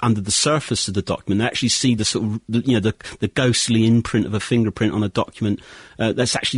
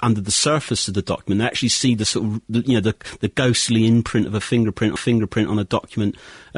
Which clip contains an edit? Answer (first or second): second